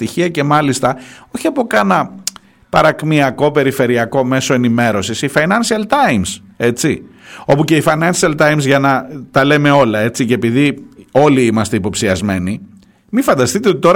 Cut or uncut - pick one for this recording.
uncut